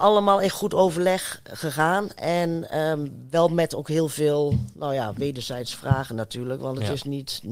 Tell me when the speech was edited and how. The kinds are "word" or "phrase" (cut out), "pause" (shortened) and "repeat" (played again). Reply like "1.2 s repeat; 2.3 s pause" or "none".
none